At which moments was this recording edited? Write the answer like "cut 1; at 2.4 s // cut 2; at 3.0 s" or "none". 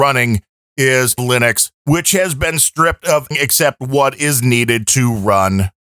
cut 1; at 1.2 s // cut 2; at 1.7 s // cut 3; at 3.3 s

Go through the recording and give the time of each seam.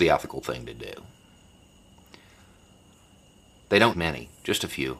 cut 1; at 3.9 s

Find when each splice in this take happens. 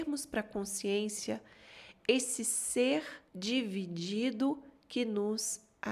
cut 1; at 3.3 s

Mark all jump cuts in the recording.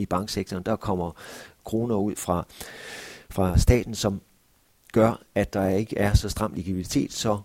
none

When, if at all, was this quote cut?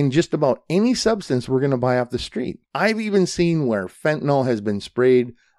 cut 1; at 2.6 s

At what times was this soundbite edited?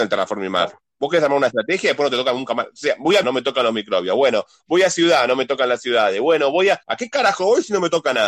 cut 1; at 3.2 s // cut 2; at 6.8 s

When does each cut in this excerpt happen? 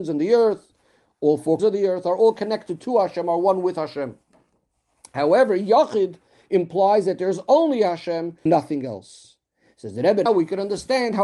cut 1; at 1.6 s // cut 2; at 8.5 s // cut 3; at 10.3 s

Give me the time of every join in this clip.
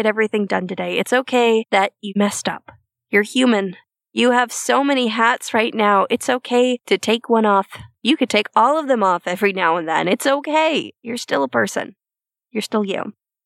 none

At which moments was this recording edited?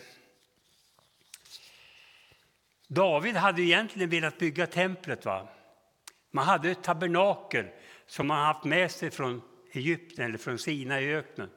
none

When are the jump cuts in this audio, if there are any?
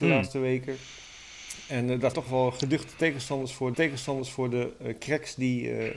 cut 1; at 2.1 s // cut 2; at 3.7 s

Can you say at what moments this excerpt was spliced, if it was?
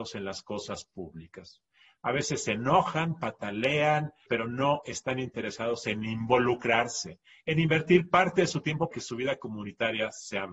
cut 1; at 4.3 s // cut 2; at 8.9 s

